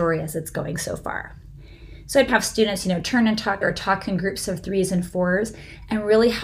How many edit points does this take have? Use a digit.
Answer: 2